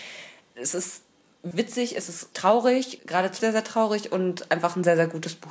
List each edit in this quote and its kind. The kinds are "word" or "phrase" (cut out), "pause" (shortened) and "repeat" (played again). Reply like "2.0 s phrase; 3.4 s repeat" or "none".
1.5 s word; 2.3 s word; 3.0 s word; 3.4 s word